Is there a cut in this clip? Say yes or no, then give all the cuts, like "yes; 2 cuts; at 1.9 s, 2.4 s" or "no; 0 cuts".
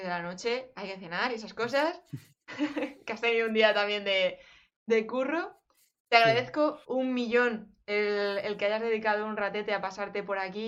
no; 0 cuts